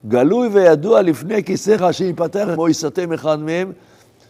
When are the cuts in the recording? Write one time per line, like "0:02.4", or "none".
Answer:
0:01.8
0:02.6